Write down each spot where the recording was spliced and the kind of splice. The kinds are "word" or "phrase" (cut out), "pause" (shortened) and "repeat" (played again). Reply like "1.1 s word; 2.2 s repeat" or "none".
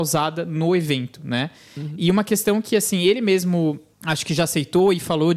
none